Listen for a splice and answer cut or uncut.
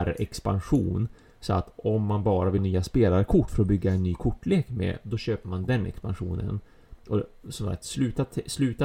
cut